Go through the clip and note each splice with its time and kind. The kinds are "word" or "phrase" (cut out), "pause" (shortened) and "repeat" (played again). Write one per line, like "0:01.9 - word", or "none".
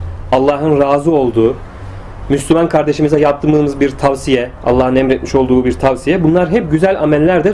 none